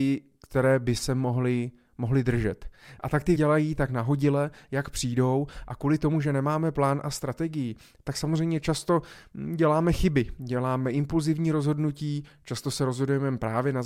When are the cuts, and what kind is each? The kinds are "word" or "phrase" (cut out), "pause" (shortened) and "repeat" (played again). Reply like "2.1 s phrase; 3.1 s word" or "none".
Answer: 3.4 s word